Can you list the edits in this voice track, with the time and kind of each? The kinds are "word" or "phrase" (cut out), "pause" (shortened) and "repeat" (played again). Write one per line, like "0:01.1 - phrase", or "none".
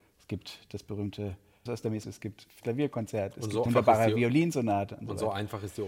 0:01.7 - word
0:02.0 - word
0:02.6 - word
0:03.7 - word

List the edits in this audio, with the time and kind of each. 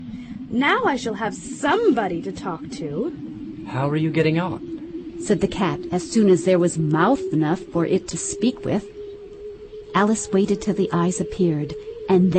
none

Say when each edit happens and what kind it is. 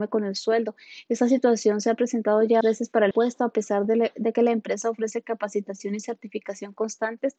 0:02.6 - word
0:03.1 - word

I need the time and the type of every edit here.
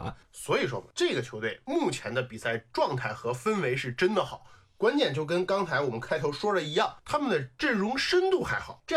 none

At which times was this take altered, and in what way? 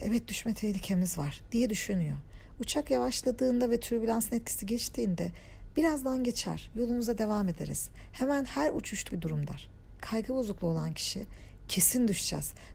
0:09.1 - word

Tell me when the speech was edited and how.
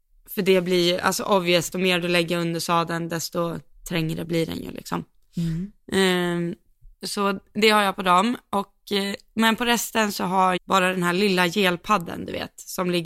0:01.7 - word
0:06.9 - pause
0:10.6 - word

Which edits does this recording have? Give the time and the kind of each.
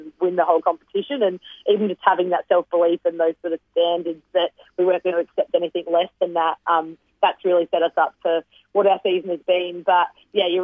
none

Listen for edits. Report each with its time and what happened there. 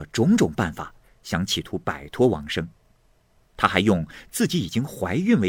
none

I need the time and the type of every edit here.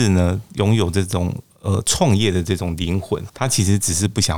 0:03.3 - word

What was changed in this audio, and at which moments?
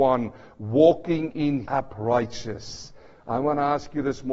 0:01.7 - word

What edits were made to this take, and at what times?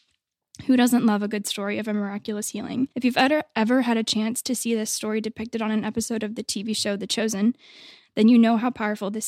0:02.9 - pause

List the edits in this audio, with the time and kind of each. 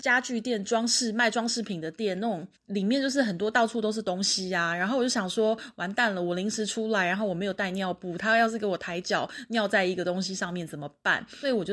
0:02.6 - pause

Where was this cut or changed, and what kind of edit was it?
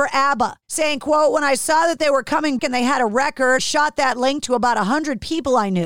0:02.6 - word
0:03.6 - word

